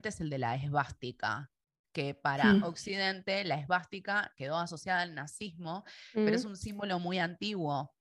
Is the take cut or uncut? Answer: uncut